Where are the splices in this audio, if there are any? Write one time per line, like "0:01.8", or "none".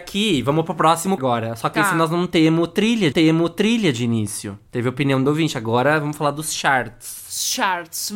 0:01.2
0:03.1
0:04.7